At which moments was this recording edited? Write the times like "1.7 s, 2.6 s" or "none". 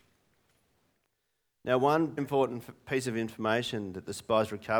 2.2 s

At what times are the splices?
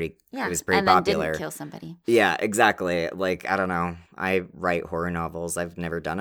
4.1 s

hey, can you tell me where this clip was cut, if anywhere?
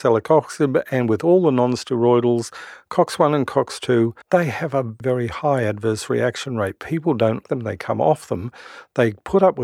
4.2 s, 5.0 s, 7.4 s

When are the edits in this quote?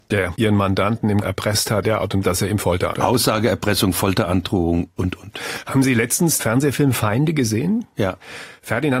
1.2 s, 1.8 s, 2.2 s, 2.9 s, 5.0 s, 6.4 s

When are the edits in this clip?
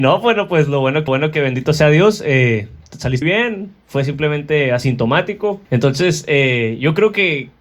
1.1 s, 3.2 s, 5.6 s

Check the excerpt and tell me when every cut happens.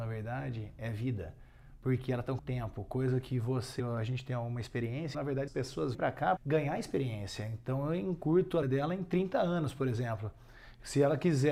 2.4 s, 3.8 s, 5.1 s, 5.5 s, 5.9 s, 6.4 s, 8.6 s

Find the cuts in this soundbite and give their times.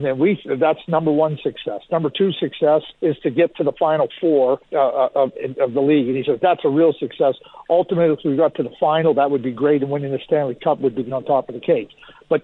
2.9 s, 4.6 s, 5.3 s, 11.1 s

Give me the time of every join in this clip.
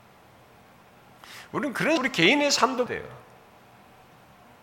2.0 s, 2.9 s

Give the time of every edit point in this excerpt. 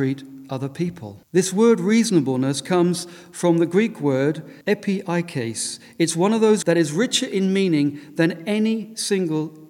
1.2 s, 4.6 s, 6.6 s

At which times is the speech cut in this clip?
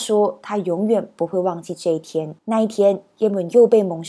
2.4 s

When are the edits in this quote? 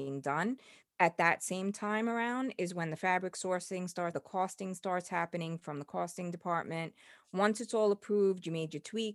4.1 s

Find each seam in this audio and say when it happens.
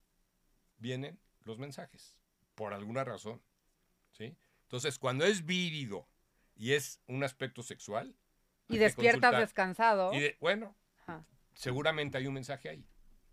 none

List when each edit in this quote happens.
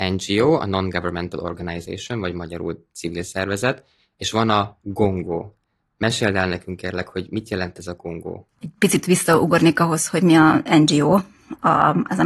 8.5 s

